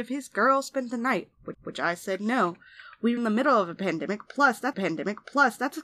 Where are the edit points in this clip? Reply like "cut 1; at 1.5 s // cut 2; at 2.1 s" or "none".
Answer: cut 1; at 1.5 s // cut 2; at 3.2 s // cut 3; at 4.7 s

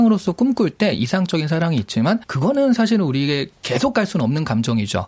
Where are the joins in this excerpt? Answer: cut 1; at 2.2 s

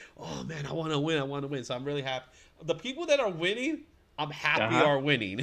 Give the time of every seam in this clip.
none

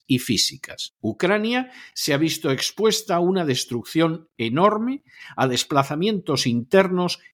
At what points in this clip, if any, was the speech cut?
cut 1; at 1.0 s

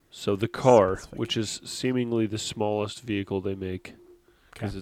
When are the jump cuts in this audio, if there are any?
none

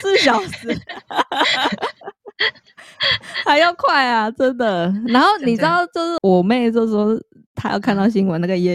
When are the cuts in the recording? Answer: none

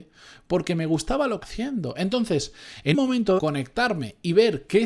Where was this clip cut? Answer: cut 1; at 1.4 s // cut 2; at 2.9 s // cut 3; at 3.4 s

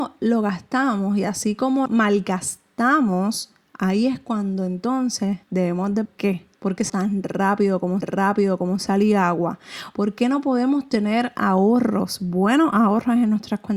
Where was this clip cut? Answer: cut 1; at 1.9 s // cut 2; at 5.4 s // cut 3; at 6.0 s // cut 4; at 6.6 s // cut 5; at 6.9 s // cut 6; at 8.0 s

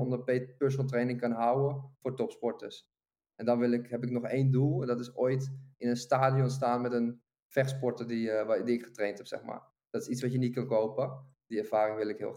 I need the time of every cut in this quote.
none

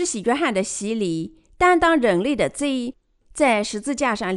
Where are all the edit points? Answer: none

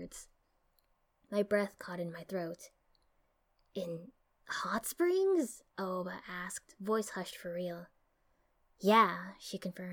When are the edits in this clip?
none

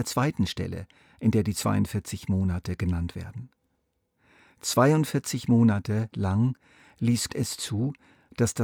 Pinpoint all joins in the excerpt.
cut 1; at 7.3 s

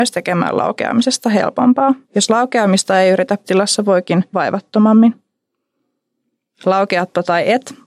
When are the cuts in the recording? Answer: cut 1; at 2.0 s // cut 2; at 3.4 s // cut 3; at 4.3 s

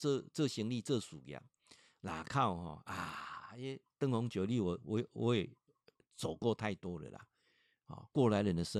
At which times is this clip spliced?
none

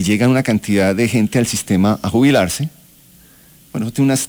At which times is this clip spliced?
none

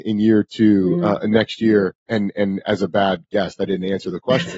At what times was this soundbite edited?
cut 1; at 2.0 s

